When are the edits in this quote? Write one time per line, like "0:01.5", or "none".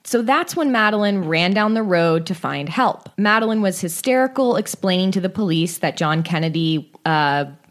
0:03.1

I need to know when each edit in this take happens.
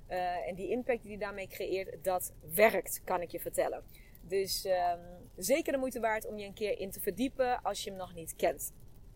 none

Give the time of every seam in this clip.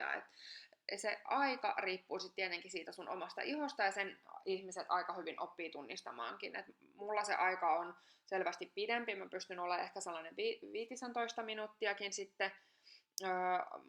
none

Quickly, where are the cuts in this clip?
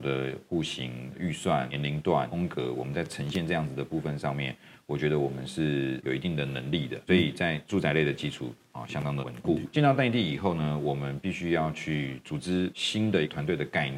none

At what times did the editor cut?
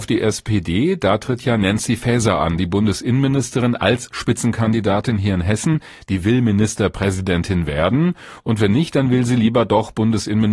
none

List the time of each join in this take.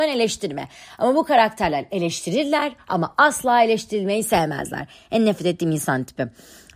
none

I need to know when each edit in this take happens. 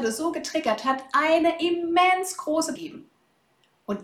0:02.8

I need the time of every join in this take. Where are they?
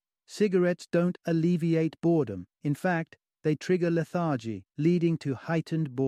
0:02.5
0:04.7

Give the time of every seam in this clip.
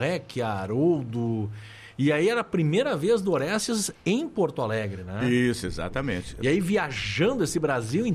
none

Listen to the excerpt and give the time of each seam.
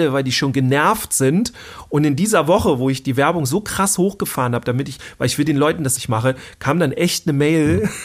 0:06.0

